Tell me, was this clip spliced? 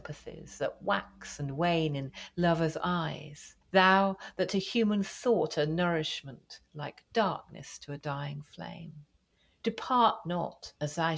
yes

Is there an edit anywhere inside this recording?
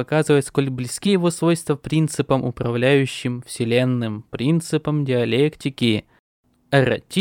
no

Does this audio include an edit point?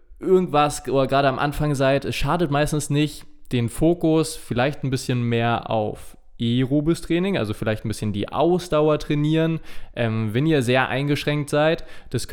no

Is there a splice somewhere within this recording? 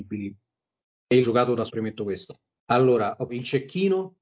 yes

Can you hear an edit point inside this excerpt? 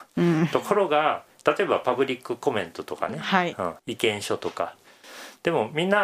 yes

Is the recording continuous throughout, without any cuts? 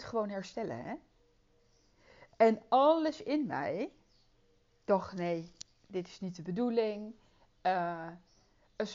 yes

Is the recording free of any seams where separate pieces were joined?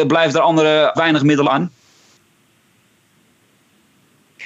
no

